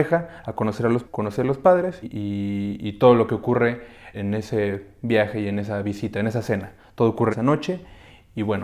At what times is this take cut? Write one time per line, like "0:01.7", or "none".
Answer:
0:01.0
0:02.0
0:04.1
0:07.3